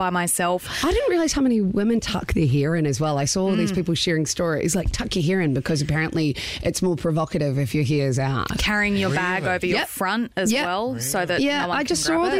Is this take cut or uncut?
uncut